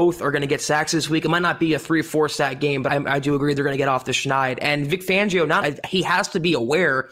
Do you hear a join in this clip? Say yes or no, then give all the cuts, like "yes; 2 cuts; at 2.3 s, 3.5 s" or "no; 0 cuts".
yes; 2 cuts; at 2.9 s, 5.6 s